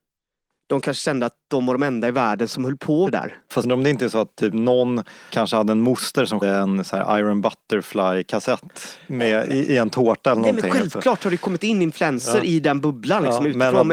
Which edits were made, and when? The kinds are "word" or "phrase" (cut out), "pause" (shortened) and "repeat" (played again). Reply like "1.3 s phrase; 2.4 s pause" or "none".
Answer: 3.1 s word; 3.6 s word; 5.3 s word; 6.4 s word